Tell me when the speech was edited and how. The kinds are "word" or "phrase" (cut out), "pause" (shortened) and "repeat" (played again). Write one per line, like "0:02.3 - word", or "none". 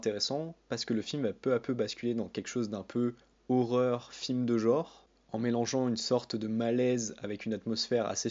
none